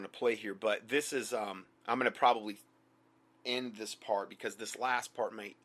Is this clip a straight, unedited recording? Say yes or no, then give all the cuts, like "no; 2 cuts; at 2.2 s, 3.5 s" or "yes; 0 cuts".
no; 1 cut; at 1.8 s